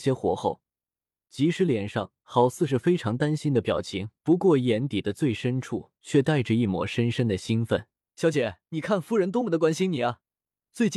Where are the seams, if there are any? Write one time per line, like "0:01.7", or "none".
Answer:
0:04.2
0:06.0
0:08.0
0:08.6